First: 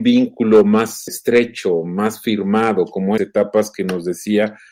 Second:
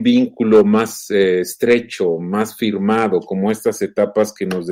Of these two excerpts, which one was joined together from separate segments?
first; 2 cuts; at 1.1 s, 3.2 s

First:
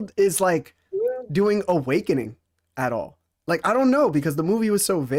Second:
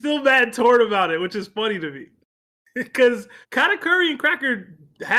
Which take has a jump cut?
second; 1 cut; at 3.4 s

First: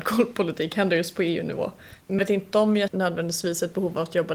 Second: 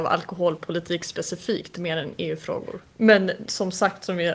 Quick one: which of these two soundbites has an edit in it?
first; 2 cuts; at 2.2 s, 2.9 s

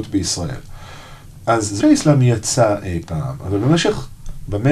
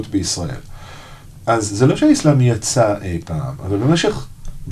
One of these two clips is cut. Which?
first; 1 cut; at 1.8 s

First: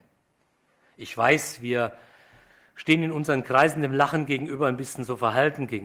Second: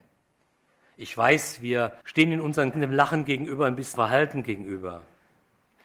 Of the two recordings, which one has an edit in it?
second; 3 cuts; at 2.0 s, 2.7 s, 3.9 s

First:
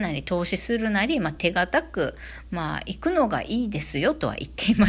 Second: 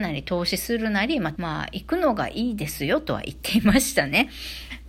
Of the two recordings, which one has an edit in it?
second; 1 cut; at 1.4 s

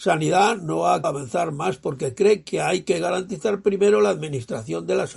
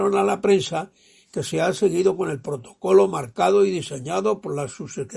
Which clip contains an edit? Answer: first; 1 cut; at 1.0 s

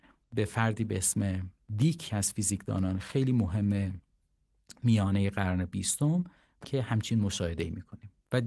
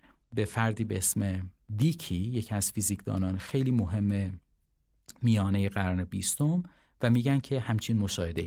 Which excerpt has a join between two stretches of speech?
first; 2 cuts; at 2.1 s, 6.6 s

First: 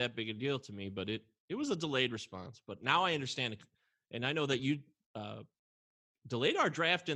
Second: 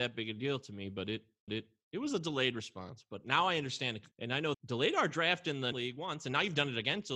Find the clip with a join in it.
second; 4 cuts; at 1.5 s, 4.1 s, 4.5 s, 5.7 s

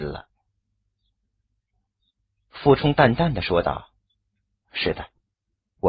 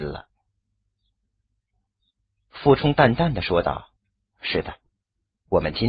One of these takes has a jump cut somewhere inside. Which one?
second; 1 cut; at 4.0 s

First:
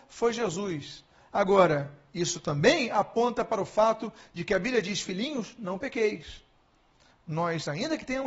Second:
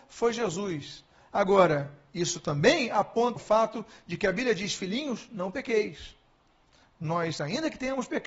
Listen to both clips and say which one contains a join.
second; 1 cut; at 3.4 s

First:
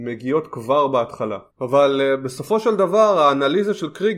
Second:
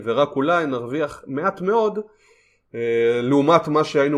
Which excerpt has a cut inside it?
first; 1 cut; at 1.5 s

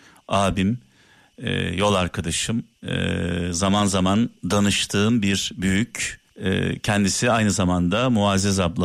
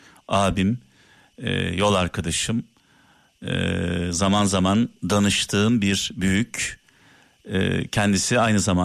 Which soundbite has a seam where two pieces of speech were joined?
first; 2 cuts; at 2.7 s, 6.3 s

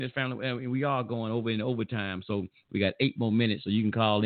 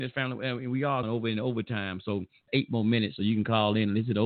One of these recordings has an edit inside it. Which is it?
second; 2 cuts; at 1.0 s, 2.5 s

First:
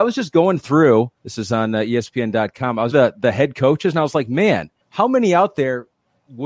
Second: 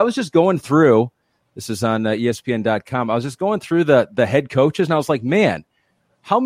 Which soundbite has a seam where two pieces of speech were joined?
first; 3 cuts; at 1.2 s, 2.9 s, 4.8 s

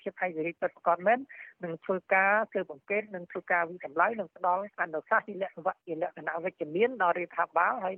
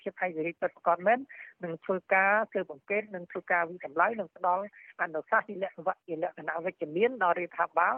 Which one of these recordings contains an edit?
first; 1 cut; at 4.7 s

